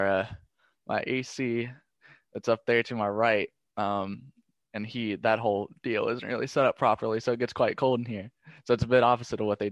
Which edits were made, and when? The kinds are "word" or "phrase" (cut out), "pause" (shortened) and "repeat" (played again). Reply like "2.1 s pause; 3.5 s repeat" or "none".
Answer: none